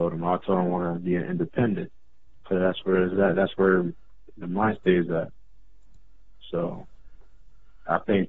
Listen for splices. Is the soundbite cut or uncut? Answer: uncut